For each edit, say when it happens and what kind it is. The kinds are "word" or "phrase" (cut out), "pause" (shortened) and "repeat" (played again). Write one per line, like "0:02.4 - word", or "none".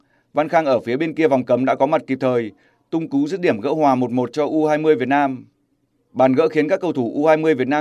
none